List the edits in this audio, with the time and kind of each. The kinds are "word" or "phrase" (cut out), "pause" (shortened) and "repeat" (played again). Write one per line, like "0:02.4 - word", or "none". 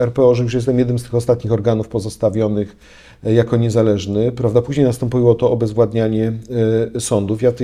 none